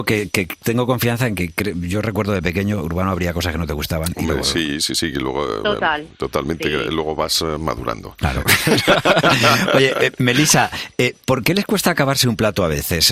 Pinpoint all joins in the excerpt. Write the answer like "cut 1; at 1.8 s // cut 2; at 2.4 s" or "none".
none